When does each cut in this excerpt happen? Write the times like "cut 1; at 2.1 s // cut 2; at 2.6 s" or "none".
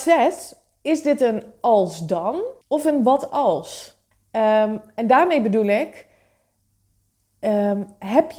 cut 1; at 2.6 s // cut 2; at 4.1 s

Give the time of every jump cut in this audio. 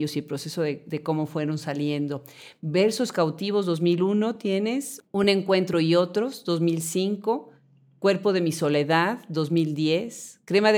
none

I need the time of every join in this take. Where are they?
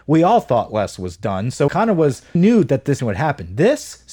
cut 1; at 1.7 s // cut 2; at 2.4 s // cut 3; at 3.0 s

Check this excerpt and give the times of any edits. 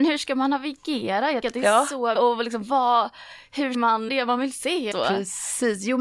cut 1; at 1.4 s // cut 2; at 2.2 s // cut 3; at 3.7 s // cut 4; at 4.1 s // cut 5; at 4.9 s

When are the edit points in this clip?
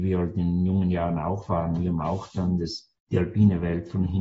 cut 1; at 3.0 s

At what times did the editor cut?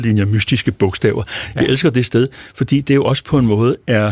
none

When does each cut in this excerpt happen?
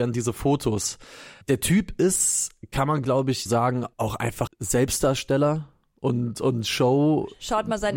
cut 1; at 1.4 s // cut 2; at 3.5 s // cut 3; at 3.9 s // cut 4; at 4.5 s

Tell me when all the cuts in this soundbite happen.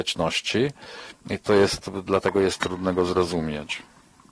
none

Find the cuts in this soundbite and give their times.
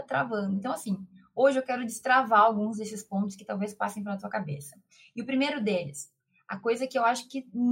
none

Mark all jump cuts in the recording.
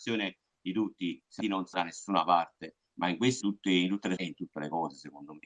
cut 1; at 1.4 s // cut 2; at 1.7 s // cut 3; at 3.4 s // cut 4; at 4.2 s

